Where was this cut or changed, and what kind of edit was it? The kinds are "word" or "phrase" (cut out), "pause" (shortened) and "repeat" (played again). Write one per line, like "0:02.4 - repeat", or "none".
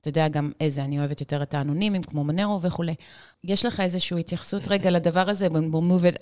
0:03.3 - word

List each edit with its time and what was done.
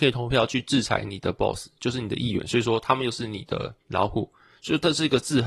0:03.8 - pause

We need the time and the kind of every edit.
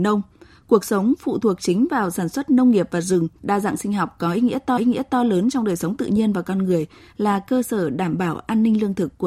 0:03.4 - pause
0:04.8 - repeat

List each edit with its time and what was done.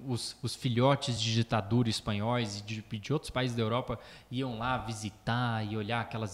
none

